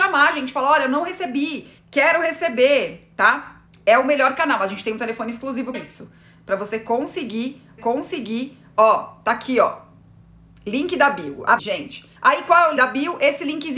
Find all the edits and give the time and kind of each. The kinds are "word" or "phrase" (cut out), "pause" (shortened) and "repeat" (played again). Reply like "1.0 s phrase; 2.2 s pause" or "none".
1.8 s pause; 3.7 s pause; 5.7 s word; 7.8 s repeat; 11.6 s phrase; 12.2 s pause; 12.8 s word